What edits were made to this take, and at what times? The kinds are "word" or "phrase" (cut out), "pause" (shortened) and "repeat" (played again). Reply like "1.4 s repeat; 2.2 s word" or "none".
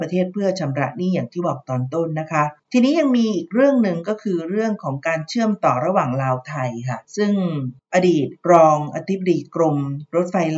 2.6 s pause; 8.4 s pause